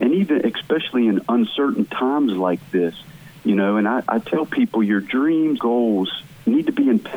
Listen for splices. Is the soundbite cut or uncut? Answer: cut